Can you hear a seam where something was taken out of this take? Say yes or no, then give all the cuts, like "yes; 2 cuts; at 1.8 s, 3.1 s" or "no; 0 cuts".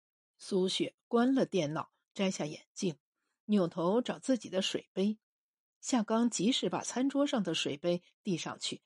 no; 0 cuts